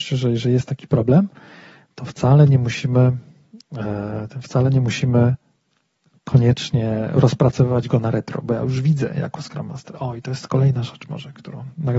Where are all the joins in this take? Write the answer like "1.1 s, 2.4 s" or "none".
none